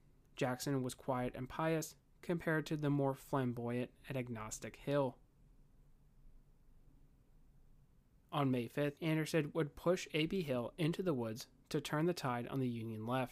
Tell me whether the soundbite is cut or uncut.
cut